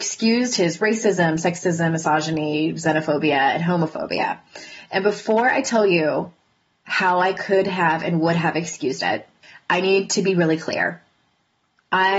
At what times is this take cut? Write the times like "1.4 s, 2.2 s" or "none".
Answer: none